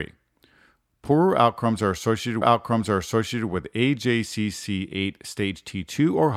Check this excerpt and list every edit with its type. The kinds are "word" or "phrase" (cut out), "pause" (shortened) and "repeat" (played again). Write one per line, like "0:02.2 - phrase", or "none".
0:02.4 - repeat

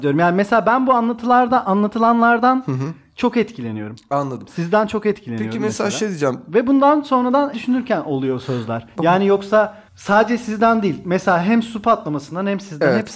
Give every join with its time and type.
0:07.5 - word
0:09.9 - pause

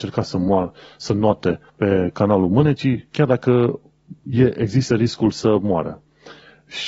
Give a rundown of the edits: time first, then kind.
0:01.7 - pause
0:03.1 - pause
0:04.2 - pause

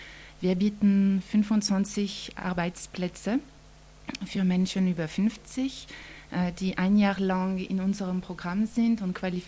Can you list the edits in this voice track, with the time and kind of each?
none

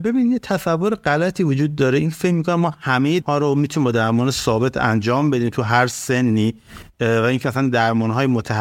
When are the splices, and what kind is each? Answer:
0:03.2 - word

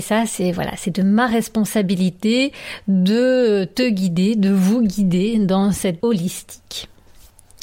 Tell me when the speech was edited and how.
0:06.0 - word

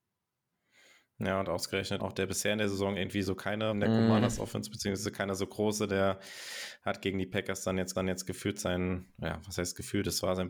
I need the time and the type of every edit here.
0:02.0 - phrase
0:03.7 - phrase
0:07.9 - repeat

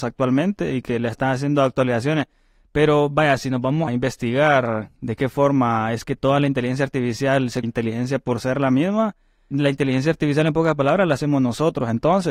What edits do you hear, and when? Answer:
0:03.9 - word
0:07.6 - word
0:09.5 - word

